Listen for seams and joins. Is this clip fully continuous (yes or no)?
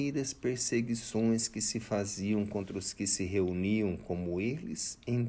yes